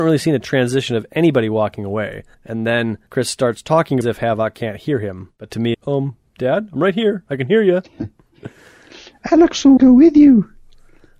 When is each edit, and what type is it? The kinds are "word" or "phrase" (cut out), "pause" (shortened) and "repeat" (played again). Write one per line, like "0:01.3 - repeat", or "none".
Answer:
0:02.3 - pause
0:03.1 - pause
0:04.0 - phrase
0:05.7 - phrase
0:09.8 - phrase